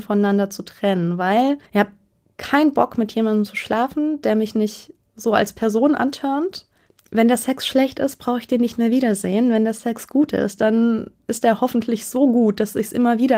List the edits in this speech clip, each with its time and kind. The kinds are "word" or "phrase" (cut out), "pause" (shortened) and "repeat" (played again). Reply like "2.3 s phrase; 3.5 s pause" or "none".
1.7 s pause

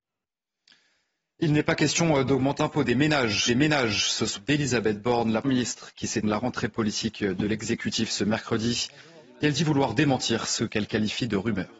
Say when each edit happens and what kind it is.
2.6 s word; 3.5 s repeat; 4.4 s phrase; 5.4 s word; 6.2 s phrase

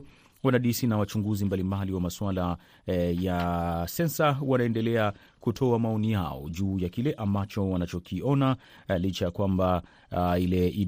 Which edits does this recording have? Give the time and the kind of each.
none

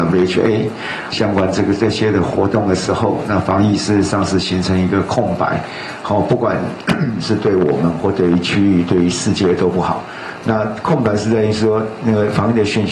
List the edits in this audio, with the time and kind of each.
1.1 s phrase

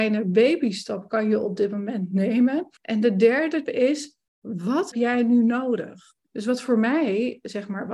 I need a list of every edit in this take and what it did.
2.8 s pause; 3.7 s word; 4.9 s word; 6.2 s pause

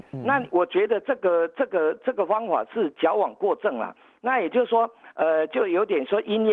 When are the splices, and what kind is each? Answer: none

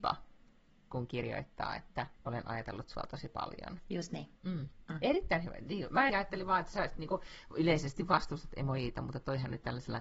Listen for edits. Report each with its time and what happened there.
2.2 s pause; 4.4 s pause; 6.1 s word

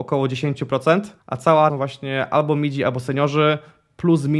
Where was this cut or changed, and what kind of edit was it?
1.2 s pause; 1.7 s phrase

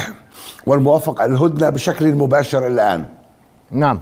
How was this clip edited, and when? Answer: 1.2 s word

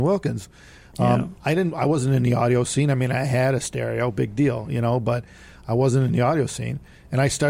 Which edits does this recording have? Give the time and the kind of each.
none

